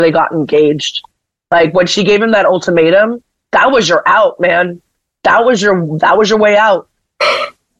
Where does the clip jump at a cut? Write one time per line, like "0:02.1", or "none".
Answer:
none